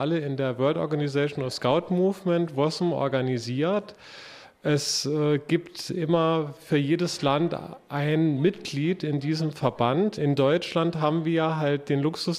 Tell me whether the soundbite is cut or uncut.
cut